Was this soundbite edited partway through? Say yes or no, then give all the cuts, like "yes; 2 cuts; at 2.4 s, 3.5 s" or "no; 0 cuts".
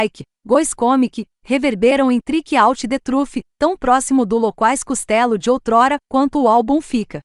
no; 0 cuts